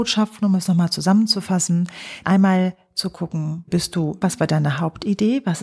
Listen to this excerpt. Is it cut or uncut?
cut